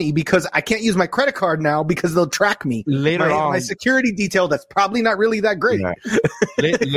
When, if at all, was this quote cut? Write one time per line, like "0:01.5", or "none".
none